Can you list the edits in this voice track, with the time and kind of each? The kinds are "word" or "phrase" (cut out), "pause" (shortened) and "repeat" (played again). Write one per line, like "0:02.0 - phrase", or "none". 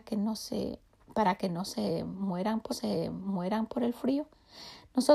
0:02.7 - repeat